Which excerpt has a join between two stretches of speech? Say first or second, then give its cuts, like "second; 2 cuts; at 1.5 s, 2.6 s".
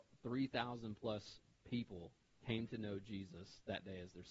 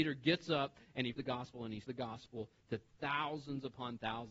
second; 2 cuts; at 1.1 s, 1.8 s